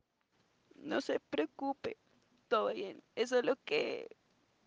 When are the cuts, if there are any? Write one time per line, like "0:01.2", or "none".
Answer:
0:02.7